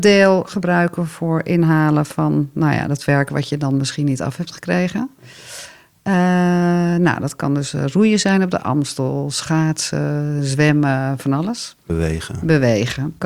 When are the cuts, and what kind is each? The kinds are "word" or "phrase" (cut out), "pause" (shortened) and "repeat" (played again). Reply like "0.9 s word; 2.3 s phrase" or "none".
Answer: none